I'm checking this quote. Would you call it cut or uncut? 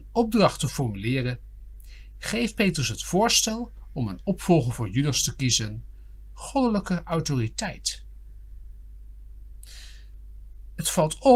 uncut